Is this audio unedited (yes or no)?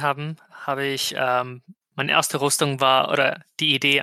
yes